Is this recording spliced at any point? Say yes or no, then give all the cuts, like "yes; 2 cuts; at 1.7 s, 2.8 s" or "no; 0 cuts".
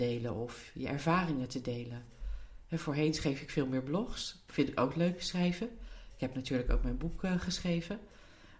no; 0 cuts